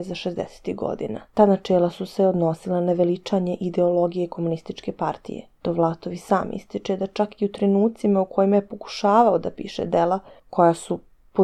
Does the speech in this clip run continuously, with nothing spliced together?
no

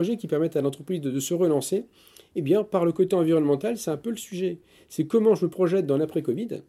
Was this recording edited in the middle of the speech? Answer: no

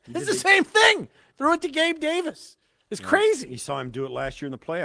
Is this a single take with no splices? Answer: yes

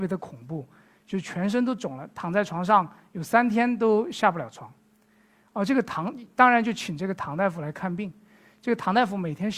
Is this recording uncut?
yes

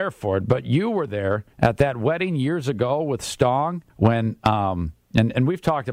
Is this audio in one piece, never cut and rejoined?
no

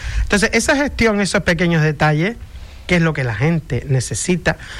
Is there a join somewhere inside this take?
no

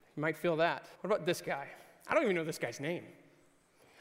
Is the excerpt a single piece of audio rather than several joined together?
no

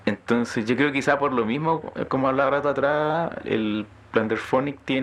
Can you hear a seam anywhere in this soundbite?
no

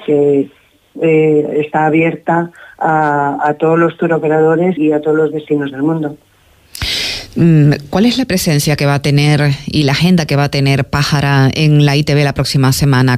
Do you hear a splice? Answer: yes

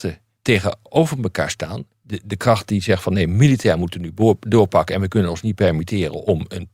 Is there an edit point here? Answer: no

